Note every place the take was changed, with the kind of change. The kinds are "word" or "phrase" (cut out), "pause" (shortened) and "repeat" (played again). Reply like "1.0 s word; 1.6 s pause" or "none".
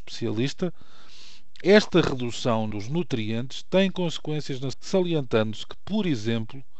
2.7 s word; 4.7 s word